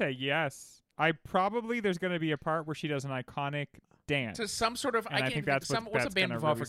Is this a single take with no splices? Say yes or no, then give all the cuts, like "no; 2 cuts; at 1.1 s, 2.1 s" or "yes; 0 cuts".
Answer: yes; 0 cuts